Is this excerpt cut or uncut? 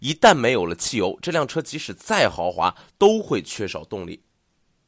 uncut